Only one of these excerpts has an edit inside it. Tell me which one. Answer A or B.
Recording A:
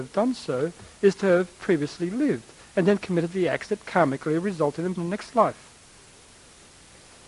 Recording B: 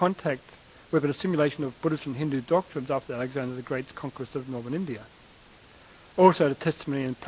A